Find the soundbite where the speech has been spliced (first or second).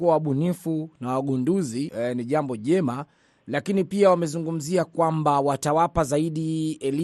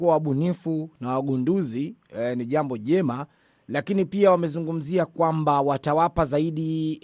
first